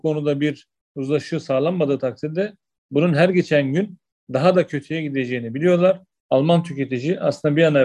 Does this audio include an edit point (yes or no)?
no